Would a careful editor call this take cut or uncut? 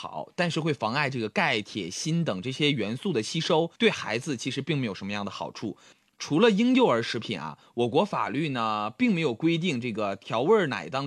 cut